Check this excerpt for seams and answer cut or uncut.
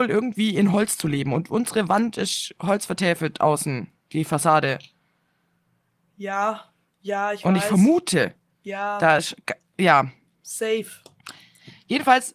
uncut